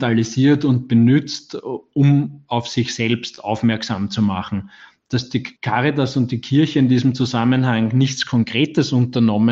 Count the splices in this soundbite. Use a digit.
0